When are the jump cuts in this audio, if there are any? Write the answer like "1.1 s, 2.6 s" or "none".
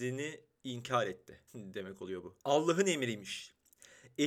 1.5 s, 2.4 s